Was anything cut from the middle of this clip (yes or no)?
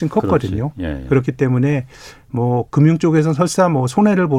no